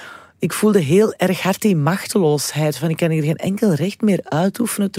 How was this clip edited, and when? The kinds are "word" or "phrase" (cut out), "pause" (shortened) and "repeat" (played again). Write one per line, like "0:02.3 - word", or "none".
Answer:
none